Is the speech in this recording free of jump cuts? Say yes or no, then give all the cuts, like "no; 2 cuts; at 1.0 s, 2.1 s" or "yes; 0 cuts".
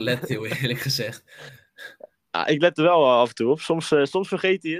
yes; 0 cuts